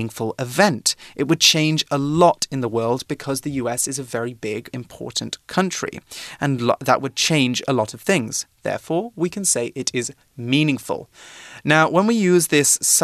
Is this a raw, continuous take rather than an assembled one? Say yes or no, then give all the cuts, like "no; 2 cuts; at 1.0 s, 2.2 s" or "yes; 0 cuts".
no; 1 cut; at 4.7 s